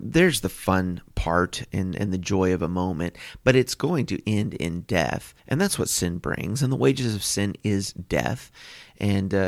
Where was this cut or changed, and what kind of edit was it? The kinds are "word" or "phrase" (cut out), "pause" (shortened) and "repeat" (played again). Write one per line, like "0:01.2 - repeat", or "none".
0:05.4 - pause